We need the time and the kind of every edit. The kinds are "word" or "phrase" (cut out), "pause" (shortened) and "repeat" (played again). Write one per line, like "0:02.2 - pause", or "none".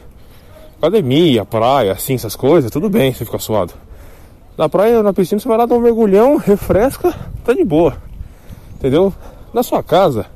none